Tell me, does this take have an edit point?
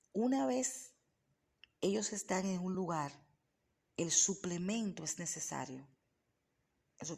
no; 0 cuts

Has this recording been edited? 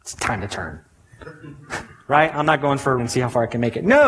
yes; 1 cut; at 3.0 s

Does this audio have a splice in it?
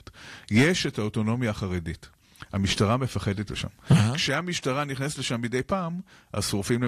yes; 1 cut; at 3.5 s

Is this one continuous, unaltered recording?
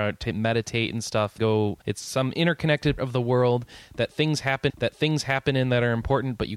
no; 4 cuts; at 1.4 s, 1.8 s, 3.0 s, 4.7 s

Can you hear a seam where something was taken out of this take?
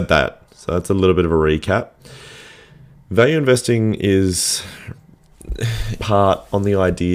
yes; 1 cut; at 6.0 s

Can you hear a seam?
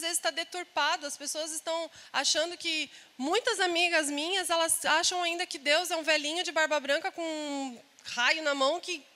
no; 0 cuts

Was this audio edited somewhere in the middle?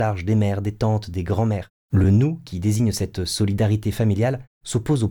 no; 0 cuts

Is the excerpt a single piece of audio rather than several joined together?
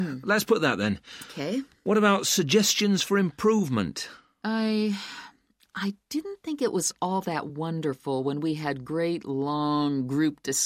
yes; 0 cuts

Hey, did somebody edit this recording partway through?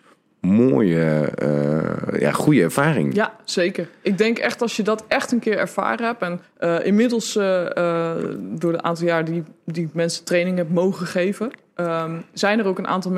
yes; 1 cut; at 6.4 s

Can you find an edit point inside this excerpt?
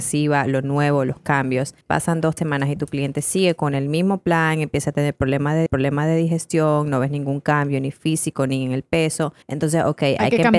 yes; 4 cuts; at 1.8 s, 2.4 s, 5.7 s, 9.4 s

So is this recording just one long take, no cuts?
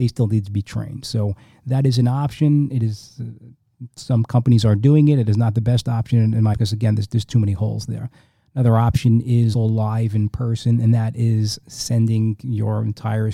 no; 2 cuts; at 6.5 s, 9.5 s

